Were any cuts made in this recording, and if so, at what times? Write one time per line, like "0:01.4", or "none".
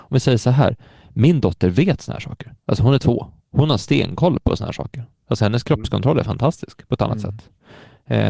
0:02.6
0:03.4